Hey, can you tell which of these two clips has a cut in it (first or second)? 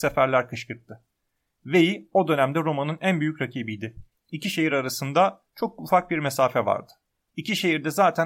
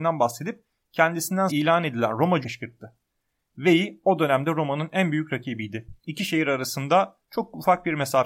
second